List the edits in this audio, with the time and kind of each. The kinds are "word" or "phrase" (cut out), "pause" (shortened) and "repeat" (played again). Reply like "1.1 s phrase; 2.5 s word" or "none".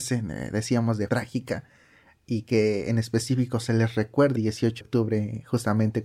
1.1 s word; 4.4 s phrase; 4.8 s word

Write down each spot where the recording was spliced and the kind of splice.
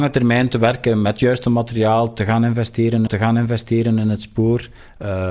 3.1 s repeat

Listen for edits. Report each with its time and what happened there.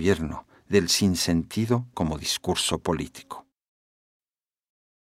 1.9 s word

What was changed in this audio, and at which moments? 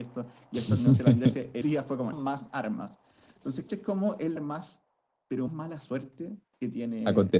1.6 s word; 2.1 s word; 3.7 s word; 4.4 s word; 5.5 s word

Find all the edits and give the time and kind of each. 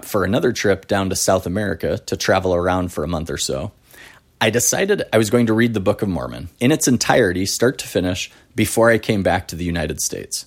6.5 s pause

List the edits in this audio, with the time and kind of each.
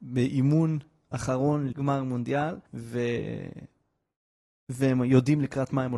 1.7 s word; 2.7 s pause

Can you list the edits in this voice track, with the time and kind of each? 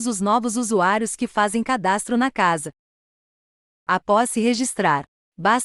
none

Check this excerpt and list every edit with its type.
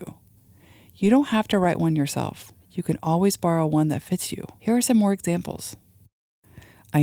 2.6 s pause; 4.6 s pause

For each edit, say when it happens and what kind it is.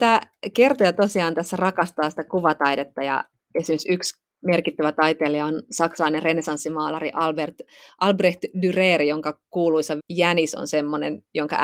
10.0 s word

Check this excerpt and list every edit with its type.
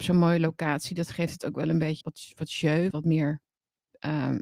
2.0 s word; 2.9 s word

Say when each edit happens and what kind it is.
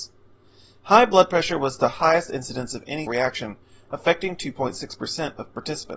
3.1 s word

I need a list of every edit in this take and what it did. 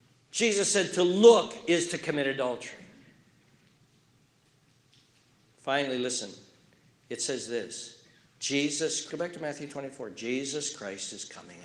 9.1 s word

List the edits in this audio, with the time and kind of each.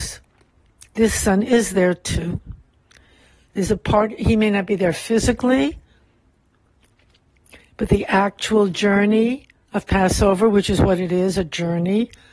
none

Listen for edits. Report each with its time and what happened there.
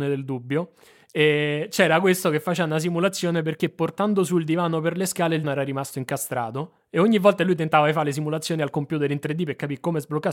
5.4 s word

